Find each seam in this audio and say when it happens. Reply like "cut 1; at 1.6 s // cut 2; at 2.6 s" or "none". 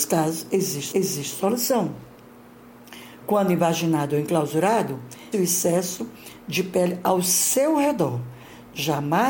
cut 1; at 0.9 s // cut 2; at 5.3 s